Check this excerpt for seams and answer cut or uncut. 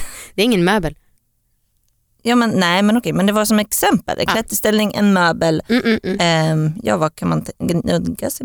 uncut